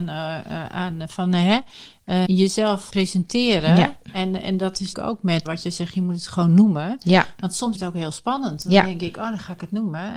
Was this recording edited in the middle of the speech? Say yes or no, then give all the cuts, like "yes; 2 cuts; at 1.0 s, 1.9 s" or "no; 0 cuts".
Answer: yes; 5 cuts; at 2.2 s, 2.9 s, 4.9 s, 5.4 s, 7.7 s